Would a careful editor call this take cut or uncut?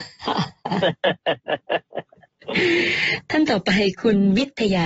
uncut